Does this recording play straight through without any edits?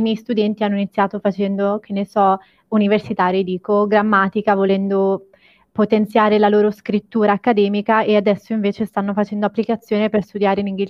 yes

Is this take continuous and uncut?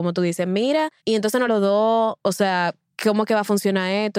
no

